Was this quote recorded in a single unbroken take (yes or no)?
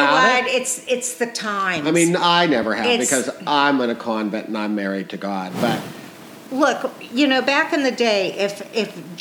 yes